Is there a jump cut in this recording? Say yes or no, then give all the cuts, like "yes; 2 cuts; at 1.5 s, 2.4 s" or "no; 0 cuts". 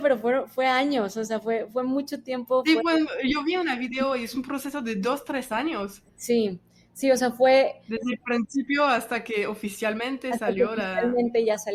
no; 0 cuts